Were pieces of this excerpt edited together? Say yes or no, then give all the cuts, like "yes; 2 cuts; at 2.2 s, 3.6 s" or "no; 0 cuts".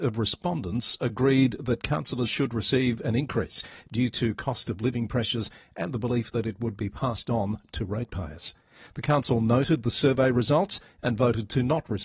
no; 0 cuts